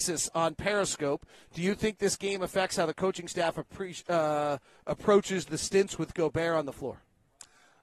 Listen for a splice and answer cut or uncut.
uncut